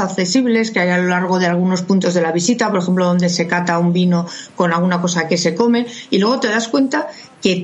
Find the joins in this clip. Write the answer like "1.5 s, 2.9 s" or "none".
none